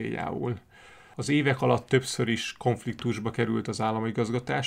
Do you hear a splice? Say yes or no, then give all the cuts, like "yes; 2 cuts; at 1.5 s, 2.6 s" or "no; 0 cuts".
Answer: no; 0 cuts